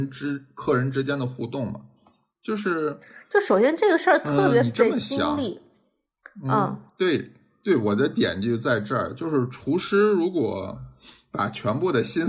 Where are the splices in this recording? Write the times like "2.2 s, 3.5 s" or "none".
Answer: 6.9 s